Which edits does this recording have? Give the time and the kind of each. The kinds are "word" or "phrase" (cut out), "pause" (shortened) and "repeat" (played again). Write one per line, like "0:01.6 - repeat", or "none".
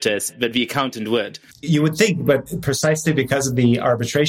0:01.5 - pause